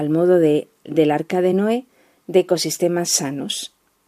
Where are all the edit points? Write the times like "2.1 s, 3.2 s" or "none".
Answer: none